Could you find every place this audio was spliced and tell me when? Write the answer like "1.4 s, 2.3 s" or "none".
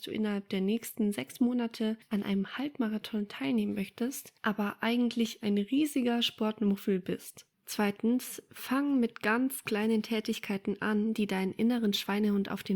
none